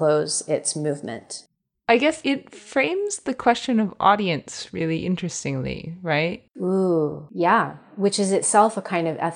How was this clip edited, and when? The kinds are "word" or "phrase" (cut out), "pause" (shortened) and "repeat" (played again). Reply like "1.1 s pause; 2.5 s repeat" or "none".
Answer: 1.6 s pause; 6.5 s pause